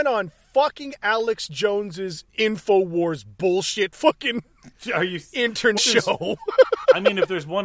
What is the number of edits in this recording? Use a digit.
2